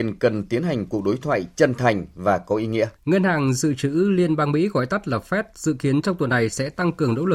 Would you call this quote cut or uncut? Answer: cut